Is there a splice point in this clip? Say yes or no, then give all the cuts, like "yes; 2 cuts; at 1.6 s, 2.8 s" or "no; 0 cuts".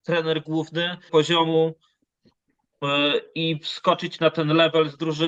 yes; 1 cut; at 1.1 s